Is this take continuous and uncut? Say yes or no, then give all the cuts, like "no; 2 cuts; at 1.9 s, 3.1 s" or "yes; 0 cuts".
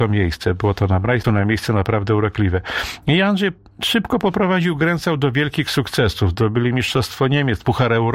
no; 1 cut; at 1.2 s